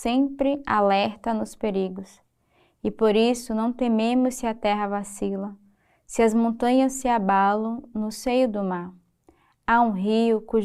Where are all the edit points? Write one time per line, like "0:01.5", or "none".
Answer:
none